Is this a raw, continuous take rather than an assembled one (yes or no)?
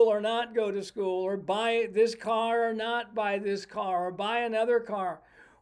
yes